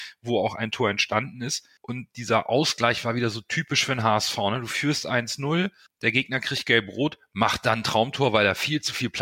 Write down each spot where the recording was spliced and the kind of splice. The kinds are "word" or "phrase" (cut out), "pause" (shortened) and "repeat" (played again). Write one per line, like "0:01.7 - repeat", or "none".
none